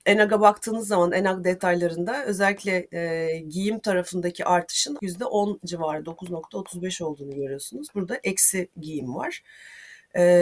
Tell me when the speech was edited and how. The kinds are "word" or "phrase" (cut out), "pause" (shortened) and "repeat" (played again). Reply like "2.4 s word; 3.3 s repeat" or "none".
5.0 s word